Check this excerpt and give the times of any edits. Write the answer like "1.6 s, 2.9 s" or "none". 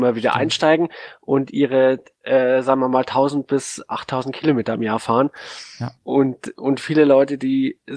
6.0 s